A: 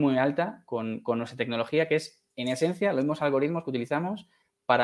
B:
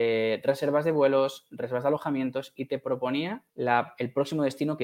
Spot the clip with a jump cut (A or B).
B